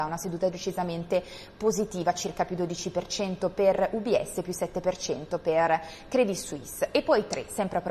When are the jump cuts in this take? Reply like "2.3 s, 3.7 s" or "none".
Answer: none